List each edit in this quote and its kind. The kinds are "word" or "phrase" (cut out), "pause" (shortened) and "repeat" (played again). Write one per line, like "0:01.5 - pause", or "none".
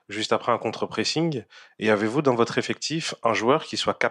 none